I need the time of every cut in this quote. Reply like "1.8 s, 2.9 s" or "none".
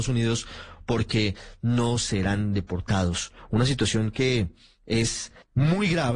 none